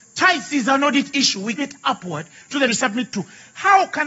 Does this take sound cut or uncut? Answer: cut